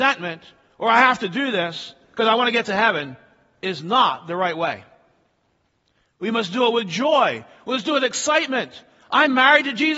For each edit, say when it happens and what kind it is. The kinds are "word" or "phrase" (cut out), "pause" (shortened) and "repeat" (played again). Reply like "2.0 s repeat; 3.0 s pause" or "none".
none

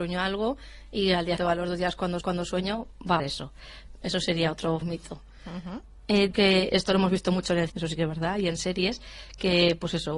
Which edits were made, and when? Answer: 1.4 s word; 2.2 s repeat; 3.2 s phrase; 4.8 s word; 6.3 s word; 6.7 s word; 7.7 s word

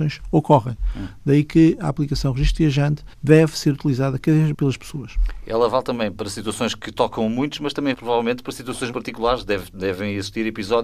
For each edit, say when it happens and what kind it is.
3.1 s pause; 4.5 s word; 7.9 s word; 8.9 s word

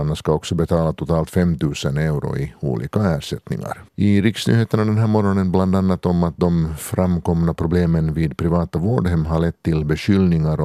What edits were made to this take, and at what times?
3.9 s pause

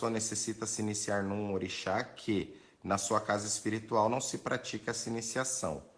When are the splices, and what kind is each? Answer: none

